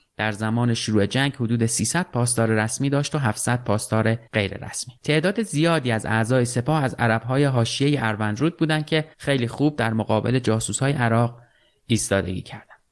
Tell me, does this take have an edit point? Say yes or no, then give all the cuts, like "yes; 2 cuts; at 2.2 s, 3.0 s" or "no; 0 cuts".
yes; 3 cuts; at 4.3 s, 5.0 s, 9.1 s